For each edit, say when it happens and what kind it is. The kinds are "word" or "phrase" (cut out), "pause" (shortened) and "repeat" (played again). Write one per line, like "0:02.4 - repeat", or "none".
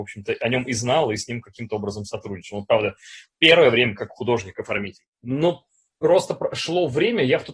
0:05.1 - pause